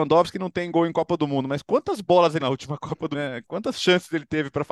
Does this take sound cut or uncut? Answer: cut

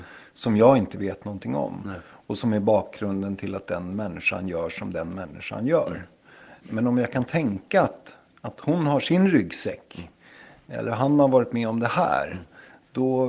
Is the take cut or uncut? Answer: uncut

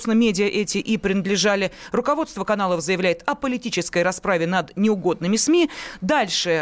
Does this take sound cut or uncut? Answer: uncut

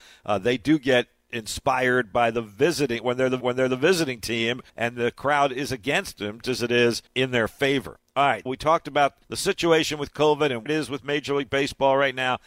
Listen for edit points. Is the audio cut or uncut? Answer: cut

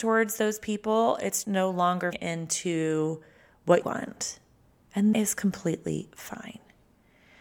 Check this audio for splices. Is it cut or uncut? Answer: cut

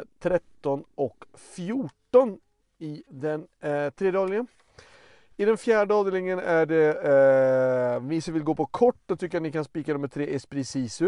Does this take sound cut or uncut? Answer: uncut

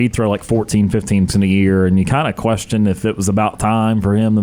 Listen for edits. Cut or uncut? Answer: cut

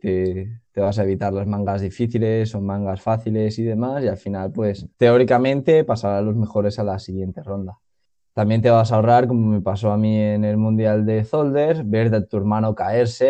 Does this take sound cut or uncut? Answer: cut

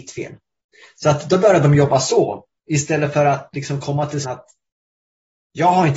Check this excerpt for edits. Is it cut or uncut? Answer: cut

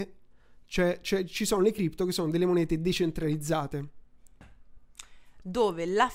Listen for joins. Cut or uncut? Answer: uncut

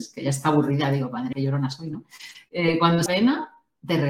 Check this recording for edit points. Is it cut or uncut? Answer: cut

